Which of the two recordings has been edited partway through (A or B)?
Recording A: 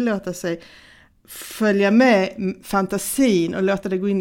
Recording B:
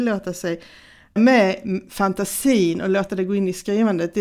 B